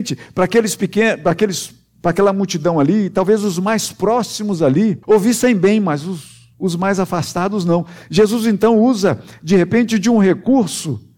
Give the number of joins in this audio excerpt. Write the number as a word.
two